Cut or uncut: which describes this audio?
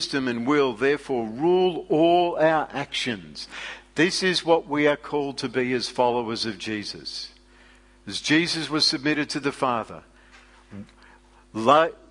uncut